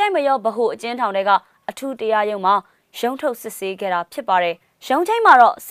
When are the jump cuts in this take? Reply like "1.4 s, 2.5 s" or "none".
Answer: none